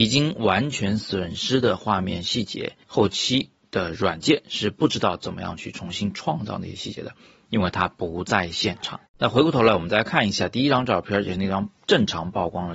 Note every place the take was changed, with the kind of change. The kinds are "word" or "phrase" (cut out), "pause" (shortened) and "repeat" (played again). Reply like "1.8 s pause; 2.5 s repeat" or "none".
2.8 s pause; 9.1 s pause